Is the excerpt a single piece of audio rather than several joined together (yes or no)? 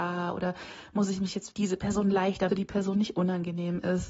no